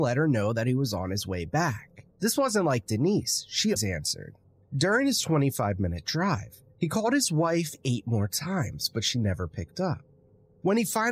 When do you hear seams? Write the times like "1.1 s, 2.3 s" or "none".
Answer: 2.1 s, 3.8 s, 4.4 s, 6.7 s